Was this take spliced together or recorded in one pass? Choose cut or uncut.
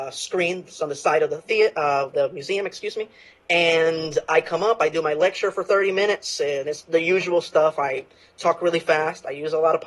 uncut